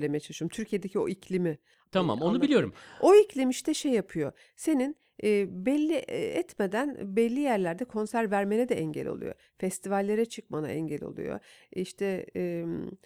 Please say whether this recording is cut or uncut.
uncut